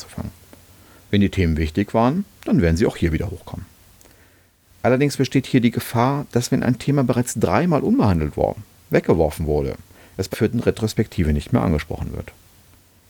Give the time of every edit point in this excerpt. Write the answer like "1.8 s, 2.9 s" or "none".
10.3 s